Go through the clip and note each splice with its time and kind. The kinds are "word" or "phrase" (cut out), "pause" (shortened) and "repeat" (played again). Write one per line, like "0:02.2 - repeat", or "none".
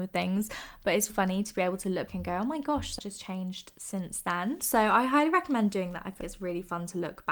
0:01.1 - word
0:02.1 - word
0:03.0 - word
0:06.2 - word